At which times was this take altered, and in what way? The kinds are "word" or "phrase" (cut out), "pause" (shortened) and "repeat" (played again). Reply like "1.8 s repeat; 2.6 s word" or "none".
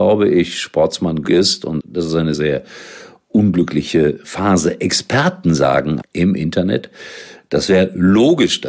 1.2 s word; 1.8 s word; 2.3 s word; 6.0 s word